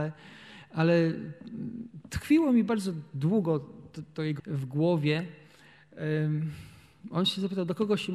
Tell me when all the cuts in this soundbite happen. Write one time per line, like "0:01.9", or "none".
0:04.4